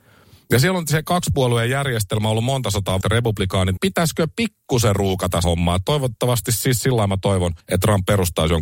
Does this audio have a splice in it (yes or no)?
yes